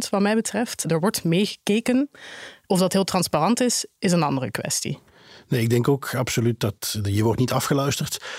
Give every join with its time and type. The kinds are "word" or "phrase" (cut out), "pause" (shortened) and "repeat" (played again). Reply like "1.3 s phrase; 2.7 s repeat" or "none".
none